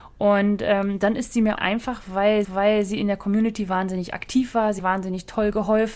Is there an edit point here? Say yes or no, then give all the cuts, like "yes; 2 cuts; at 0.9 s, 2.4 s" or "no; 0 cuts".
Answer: yes; 3 cuts; at 1.6 s, 2.4 s, 4.8 s